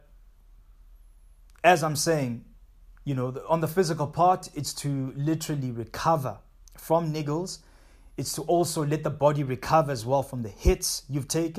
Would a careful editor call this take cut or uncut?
cut